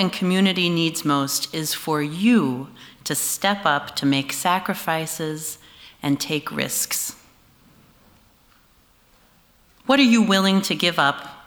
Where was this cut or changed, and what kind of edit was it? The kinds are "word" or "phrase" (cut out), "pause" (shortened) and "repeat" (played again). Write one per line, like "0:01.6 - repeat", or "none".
none